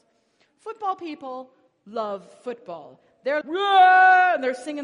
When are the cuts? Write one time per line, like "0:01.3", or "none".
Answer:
0:01.7
0:03.4